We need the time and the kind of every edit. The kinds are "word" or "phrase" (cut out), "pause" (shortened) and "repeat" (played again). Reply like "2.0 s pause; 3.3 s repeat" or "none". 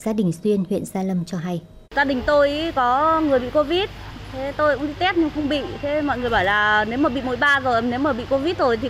1.8 s pause

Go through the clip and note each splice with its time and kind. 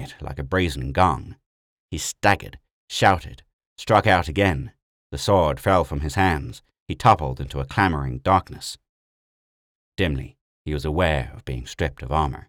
none

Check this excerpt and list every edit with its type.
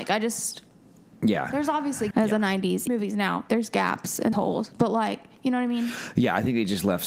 2.1 s word; 2.9 s word; 4.3 s word

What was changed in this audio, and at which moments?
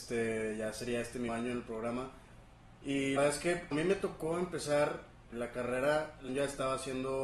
1.3 s word; 3.2 s word; 3.7 s word; 5.3 s word; 6.3 s word

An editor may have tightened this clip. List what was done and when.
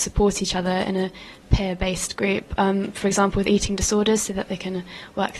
none

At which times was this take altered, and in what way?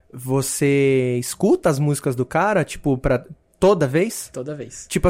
none

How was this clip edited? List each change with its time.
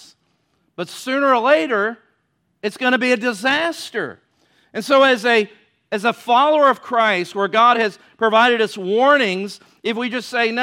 none

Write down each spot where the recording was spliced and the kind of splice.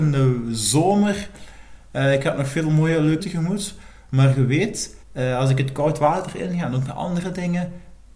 3.2 s word; 5.0 s pause

